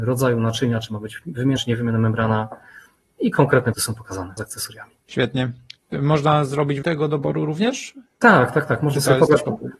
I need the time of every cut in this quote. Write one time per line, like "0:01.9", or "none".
0:01.6
0:03.7
0:04.4
0:05.0
0:06.8